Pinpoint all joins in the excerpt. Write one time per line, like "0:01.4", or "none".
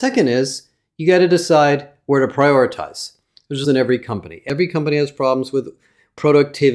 0:03.6